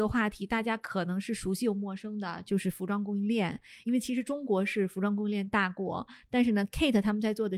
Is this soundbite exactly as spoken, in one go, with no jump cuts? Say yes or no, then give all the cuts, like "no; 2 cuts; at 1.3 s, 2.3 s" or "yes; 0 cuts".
yes; 0 cuts